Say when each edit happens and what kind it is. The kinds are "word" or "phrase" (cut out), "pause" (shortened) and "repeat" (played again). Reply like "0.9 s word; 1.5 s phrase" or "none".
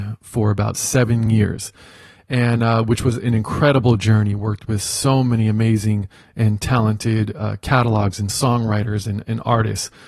none